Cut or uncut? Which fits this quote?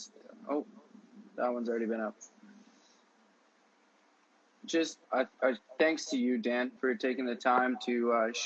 cut